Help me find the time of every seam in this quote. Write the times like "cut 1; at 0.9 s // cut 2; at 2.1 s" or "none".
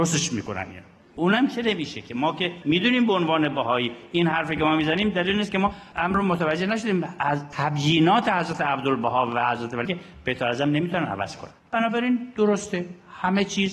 cut 1; at 7.5 s // cut 2; at 9.9 s // cut 3; at 11.6 s